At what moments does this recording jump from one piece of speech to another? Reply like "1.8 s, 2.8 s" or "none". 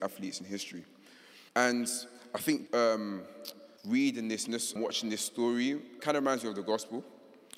1.5 s, 2.7 s, 3.8 s, 4.8 s, 6.0 s